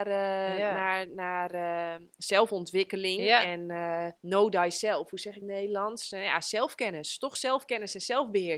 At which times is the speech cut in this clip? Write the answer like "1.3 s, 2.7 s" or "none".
4.2 s, 5.4 s